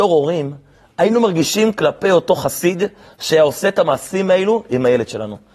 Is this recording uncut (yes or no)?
yes